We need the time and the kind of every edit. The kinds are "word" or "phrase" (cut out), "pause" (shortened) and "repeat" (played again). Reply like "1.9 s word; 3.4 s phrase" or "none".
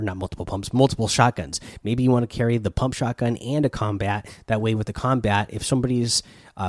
none